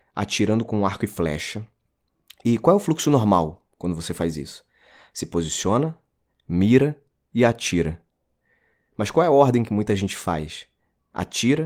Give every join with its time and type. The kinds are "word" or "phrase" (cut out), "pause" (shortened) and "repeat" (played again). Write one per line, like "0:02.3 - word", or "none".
none